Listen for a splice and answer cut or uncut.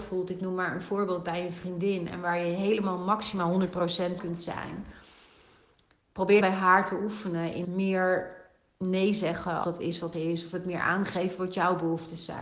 cut